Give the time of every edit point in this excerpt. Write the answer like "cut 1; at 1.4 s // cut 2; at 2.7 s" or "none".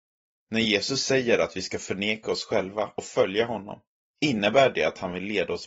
none